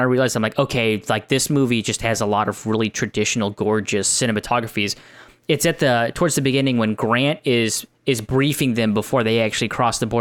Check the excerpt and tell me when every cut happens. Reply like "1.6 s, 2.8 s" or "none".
none